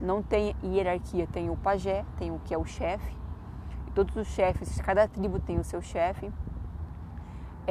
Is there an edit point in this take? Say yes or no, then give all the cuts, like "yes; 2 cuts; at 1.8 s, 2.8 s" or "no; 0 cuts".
no; 0 cuts